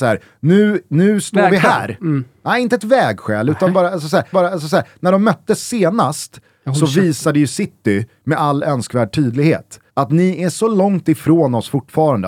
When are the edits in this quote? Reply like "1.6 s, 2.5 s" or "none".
4.3 s, 9.9 s